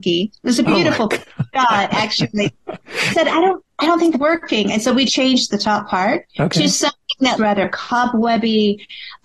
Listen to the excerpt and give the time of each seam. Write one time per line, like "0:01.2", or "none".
0:03.1
0:03.7
0:04.1
0:05.1
0:06.3
0:07.4